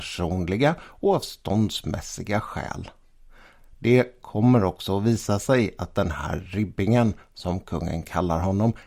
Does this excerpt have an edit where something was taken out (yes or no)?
no